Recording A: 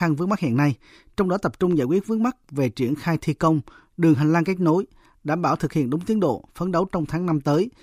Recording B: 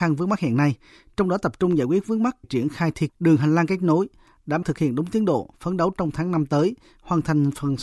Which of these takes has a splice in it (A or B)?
B